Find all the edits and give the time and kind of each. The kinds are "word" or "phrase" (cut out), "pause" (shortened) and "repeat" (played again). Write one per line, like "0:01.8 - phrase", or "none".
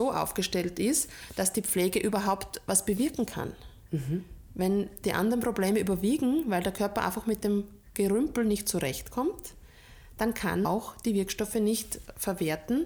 0:10.6 - word

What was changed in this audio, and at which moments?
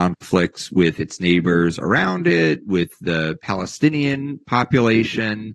none

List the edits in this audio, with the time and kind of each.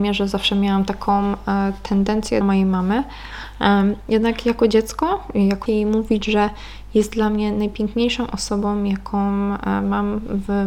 0:02.4 - phrase
0:05.7 - phrase

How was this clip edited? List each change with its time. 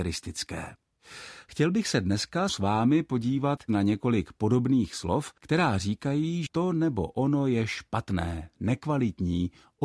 0:02.5 - word
0:05.4 - pause
0:06.5 - word

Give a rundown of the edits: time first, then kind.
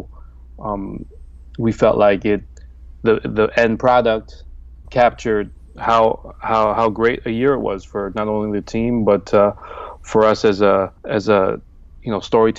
0:04.9 - word
0:11.0 - pause

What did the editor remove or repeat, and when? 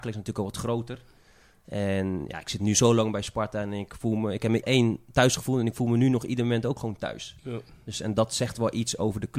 0:04.6 - phrase

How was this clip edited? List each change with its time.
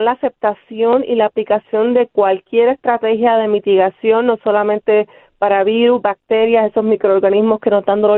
none

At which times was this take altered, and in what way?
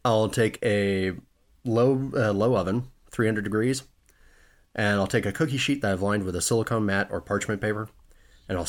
0:01.3 - pause

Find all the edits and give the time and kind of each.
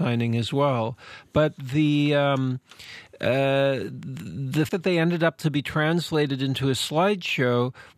0:04.7 - word
0:05.4 - phrase

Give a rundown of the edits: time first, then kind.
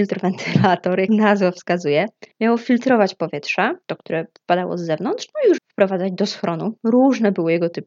0:01.1 - word
0:02.3 - pause
0:03.8 - pause
0:05.6 - word

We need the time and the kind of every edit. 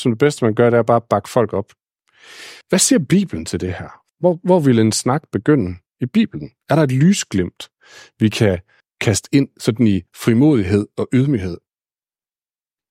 0:02.6 - pause
0:04.1 - pause
0:08.8 - pause

